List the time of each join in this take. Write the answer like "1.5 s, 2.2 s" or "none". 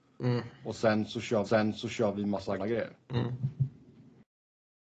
1.4 s, 2.6 s, 3.0 s